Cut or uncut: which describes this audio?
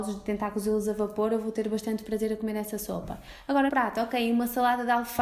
cut